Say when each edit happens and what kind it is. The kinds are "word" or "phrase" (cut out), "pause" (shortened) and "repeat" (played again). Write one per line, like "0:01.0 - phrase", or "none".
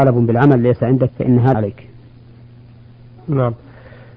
0:01.1 - word
0:01.5 - word
0:03.2 - word